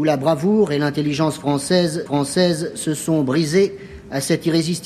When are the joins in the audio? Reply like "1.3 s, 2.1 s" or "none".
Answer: 2.1 s